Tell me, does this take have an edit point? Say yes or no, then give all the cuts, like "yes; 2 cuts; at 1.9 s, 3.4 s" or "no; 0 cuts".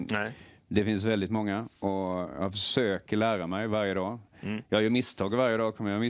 yes; 1 cut; at 1.8 s